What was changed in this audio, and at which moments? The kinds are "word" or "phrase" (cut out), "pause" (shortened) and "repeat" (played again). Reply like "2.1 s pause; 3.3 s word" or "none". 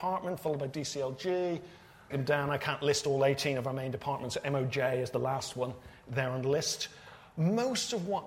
2.1 s word